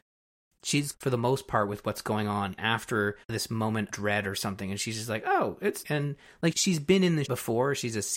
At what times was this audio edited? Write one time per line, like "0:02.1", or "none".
0:00.9
0:02.6
0:03.2
0:03.9
0:05.8
0:06.5
0:07.2